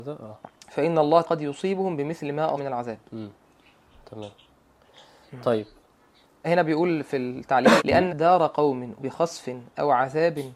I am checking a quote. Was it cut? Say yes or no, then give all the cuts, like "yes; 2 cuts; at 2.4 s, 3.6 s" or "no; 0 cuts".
yes; 6 cuts; at 1.2 s, 2.6 s, 6.4 s, 7.8 s, 8.1 s, 9.0 s